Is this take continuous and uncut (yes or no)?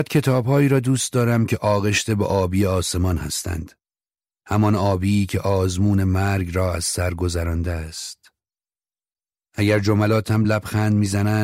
yes